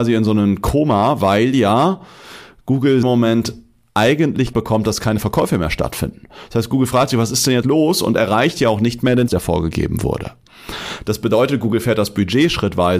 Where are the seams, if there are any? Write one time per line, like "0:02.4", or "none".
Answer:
0:03.0
0:04.5
0:07.6
0:09.3